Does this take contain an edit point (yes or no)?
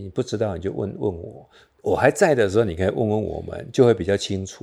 no